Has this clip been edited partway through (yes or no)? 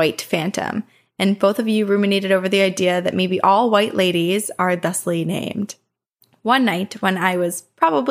no